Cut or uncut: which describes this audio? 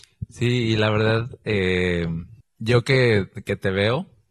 uncut